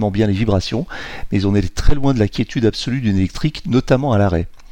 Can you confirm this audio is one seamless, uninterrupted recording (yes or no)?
yes